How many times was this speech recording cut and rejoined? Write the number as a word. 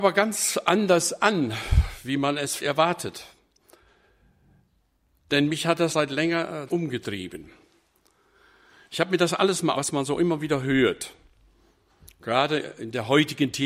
four